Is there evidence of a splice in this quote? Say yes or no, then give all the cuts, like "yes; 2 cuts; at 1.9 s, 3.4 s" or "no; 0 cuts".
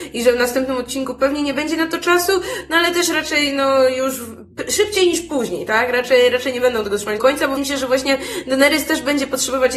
yes; 2 cuts; at 7.2 s, 7.6 s